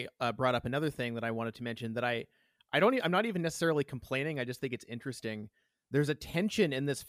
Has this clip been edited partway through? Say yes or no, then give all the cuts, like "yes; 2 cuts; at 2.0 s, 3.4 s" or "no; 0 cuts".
no; 0 cuts